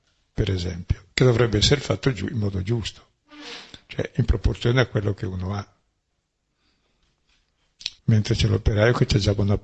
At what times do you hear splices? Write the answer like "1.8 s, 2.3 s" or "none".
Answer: 1.1 s, 8.0 s